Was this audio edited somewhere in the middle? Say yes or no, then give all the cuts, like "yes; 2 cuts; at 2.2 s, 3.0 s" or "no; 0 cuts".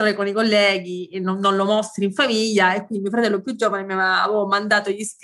no; 0 cuts